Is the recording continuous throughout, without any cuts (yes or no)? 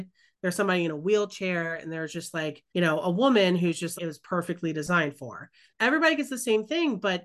no